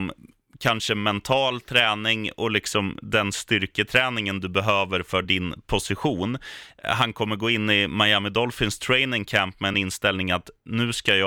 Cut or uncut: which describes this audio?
uncut